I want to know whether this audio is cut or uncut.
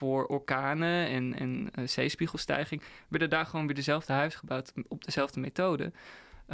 uncut